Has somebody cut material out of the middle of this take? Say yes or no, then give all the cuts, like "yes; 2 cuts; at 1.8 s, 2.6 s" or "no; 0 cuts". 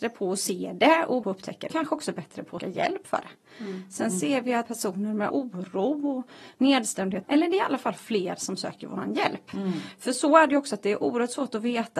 yes; 6 cuts; at 1.2 s, 1.7 s, 2.6 s, 4.7 s, 5.3 s, 7.2 s